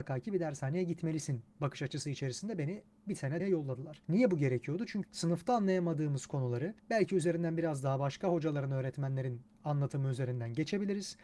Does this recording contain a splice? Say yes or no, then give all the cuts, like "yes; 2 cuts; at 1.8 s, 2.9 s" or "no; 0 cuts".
yes; 6 cuts; at 1.5 s, 3.4 s, 4.0 s, 5.0 s, 6.8 s, 9.5 s